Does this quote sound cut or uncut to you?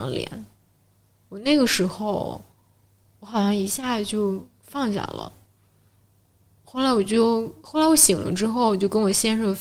uncut